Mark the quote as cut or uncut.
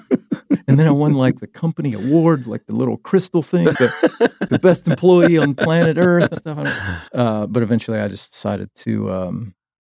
cut